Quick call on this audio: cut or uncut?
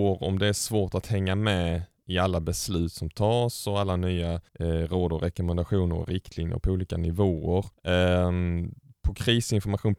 cut